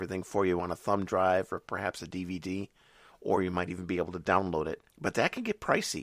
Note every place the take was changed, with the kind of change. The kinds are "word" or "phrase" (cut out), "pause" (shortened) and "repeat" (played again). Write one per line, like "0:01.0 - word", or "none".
none